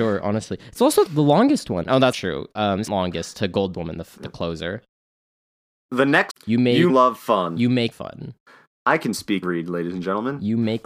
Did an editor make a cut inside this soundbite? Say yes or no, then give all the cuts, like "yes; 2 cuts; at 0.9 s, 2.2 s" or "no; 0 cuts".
yes; 8 cuts; at 1.1 s, 2.1 s, 2.9 s, 3.7 s, 6.3 s, 6.9 s, 7.9 s, 9.4 s